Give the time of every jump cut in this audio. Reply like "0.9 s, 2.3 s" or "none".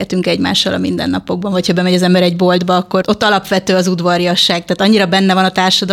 3.0 s